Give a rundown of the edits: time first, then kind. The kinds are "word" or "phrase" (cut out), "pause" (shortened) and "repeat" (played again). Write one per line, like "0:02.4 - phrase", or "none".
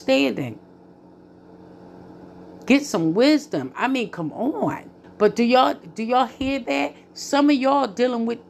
0:05.0 - pause